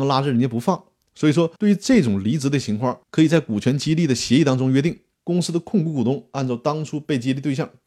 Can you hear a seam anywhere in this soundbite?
yes; 3 cuts; at 1.6 s, 3.0 s, 5.1 s

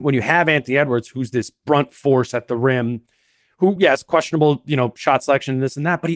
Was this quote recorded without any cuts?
yes; 0 cuts

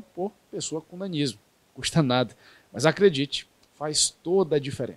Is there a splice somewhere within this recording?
no; 0 cuts

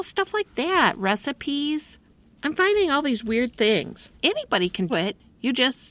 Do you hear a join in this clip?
yes; 2 cuts; at 4.2 s, 4.9 s

